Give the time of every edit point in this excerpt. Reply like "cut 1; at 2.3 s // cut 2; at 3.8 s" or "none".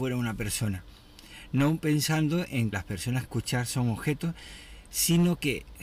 cut 1; at 2.7 s // cut 2; at 3.2 s